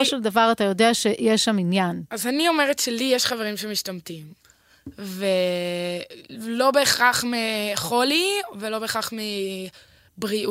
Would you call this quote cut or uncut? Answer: uncut